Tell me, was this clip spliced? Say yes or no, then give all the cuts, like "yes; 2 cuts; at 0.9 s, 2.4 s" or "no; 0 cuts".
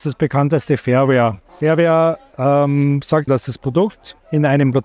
yes; 2 cuts; at 1.5 s, 3.3 s